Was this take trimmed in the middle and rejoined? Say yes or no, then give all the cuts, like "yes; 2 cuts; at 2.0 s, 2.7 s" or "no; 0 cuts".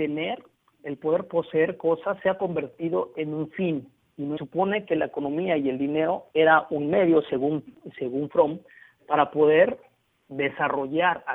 yes; 2 cuts; at 4.4 s, 6.3 s